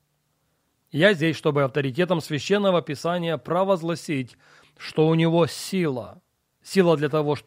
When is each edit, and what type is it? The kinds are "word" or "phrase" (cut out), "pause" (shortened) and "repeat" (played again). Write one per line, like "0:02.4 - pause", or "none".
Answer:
none